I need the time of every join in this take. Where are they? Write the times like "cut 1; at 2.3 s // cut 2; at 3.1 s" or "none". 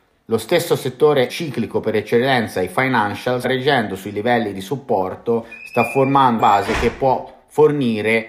cut 1; at 1.3 s // cut 2; at 3.4 s // cut 3; at 6.4 s